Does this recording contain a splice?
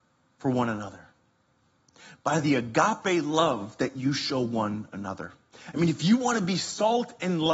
no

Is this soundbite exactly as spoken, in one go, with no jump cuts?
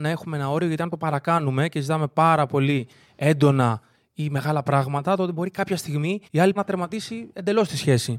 no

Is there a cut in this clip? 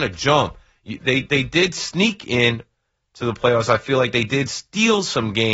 no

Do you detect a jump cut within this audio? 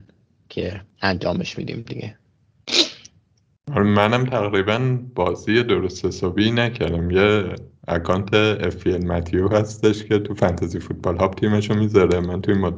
yes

